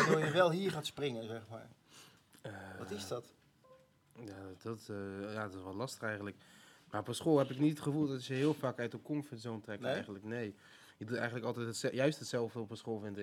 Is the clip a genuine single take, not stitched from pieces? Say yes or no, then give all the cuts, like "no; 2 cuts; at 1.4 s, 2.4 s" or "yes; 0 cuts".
yes; 0 cuts